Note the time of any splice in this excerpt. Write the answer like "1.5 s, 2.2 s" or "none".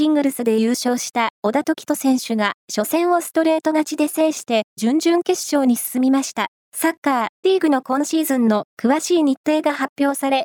2.6 s, 6.6 s, 7.4 s